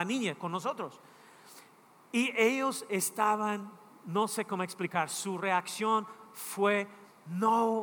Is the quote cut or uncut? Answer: uncut